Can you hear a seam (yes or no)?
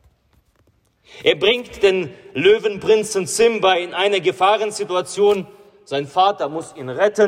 no